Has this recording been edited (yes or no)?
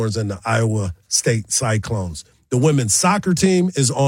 no